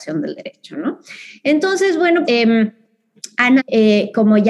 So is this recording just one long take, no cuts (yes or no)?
no